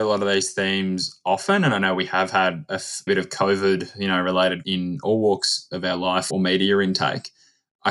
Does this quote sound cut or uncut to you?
cut